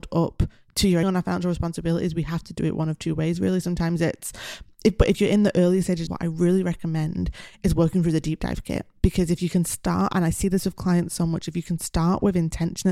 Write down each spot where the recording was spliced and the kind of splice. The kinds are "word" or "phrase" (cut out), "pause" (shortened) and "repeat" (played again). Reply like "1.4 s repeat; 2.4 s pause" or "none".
1.0 s phrase; 5.1 s phrase; 6.1 s phrase

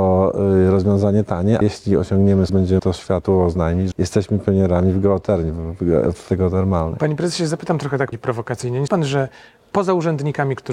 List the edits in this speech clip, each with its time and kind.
1.6 s word; 2.5 s word; 2.8 s word; 3.9 s word; 6.3 s word; 8.1 s word; 8.9 s word

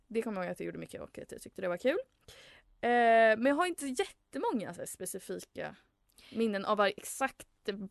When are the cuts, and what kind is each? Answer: none

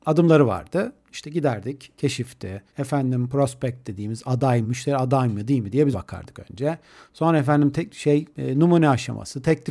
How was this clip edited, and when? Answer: 2.7 s pause; 4.6 s word; 5.9 s word; 8.3 s pause

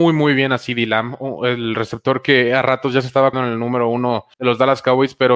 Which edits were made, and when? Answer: 3.3 s word; 4.3 s pause

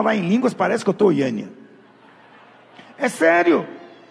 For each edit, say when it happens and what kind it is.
1.0 s word

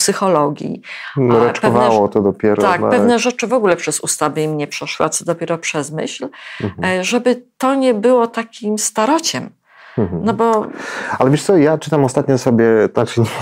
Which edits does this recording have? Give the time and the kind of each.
none

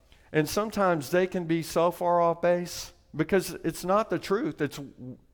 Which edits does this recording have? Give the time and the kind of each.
none

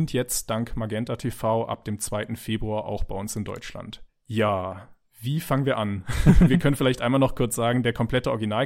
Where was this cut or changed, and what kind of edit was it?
4.1 s pause

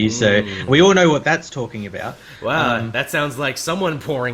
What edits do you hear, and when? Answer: none

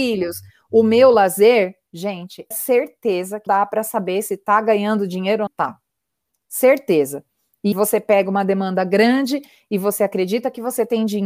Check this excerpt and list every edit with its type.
2.5 s word; 3.5 s word; 5.5 s word; 7.7 s word

